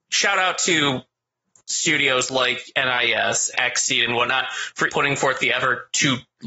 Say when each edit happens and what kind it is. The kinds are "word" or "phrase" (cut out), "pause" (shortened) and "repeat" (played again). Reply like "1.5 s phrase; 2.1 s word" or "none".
1.6 s pause; 3.5 s word; 4.9 s word